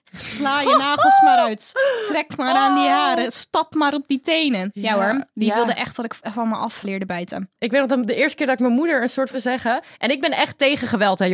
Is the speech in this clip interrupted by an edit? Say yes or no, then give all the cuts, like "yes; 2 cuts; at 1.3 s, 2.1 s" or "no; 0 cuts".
yes; 2 cuts; at 6.8 s, 9.3 s